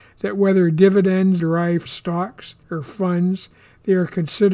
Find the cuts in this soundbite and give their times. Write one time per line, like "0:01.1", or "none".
0:01.4
0:01.9
0:02.6

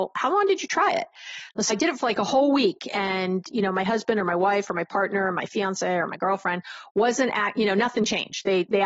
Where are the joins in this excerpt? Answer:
0:01.7

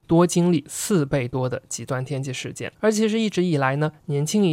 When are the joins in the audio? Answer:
0:02.7

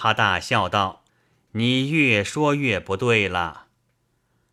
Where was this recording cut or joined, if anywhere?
0:01.1

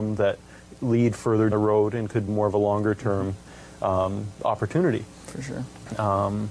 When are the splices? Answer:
0:01.5
0:02.3

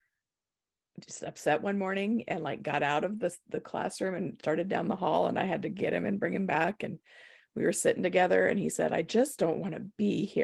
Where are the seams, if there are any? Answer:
none

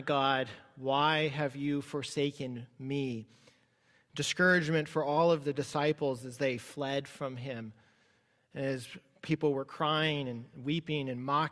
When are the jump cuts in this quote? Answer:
none

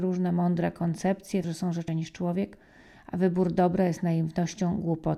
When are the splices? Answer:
0:01.4
0:01.9

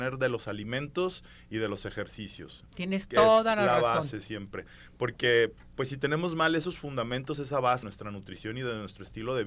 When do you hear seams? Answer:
0:07.8

